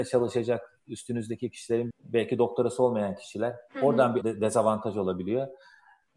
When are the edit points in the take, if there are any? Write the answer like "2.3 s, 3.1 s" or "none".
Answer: 1.9 s, 4.2 s